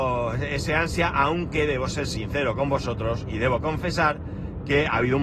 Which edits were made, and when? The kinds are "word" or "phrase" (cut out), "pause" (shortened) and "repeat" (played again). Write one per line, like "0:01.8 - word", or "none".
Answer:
none